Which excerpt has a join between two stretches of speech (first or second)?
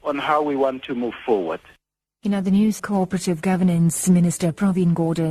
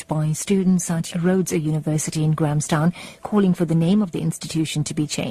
first